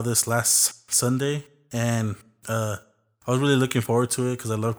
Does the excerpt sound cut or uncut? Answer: uncut